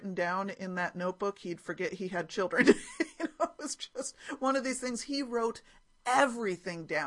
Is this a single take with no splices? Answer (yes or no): yes